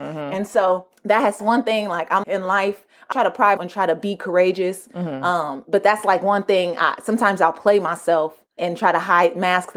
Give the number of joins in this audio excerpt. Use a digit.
6